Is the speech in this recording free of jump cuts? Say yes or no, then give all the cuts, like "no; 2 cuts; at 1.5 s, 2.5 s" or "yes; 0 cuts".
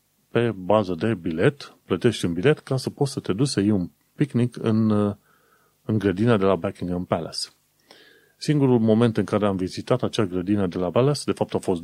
no; 1 cut; at 10.9 s